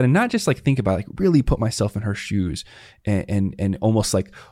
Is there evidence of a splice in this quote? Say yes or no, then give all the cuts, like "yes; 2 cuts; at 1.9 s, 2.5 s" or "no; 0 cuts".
no; 0 cuts